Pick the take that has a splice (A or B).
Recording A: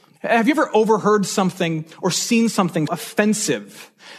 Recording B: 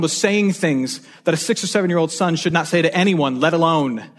A